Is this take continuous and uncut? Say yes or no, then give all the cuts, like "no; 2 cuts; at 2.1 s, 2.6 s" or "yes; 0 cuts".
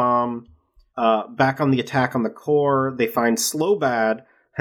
yes; 0 cuts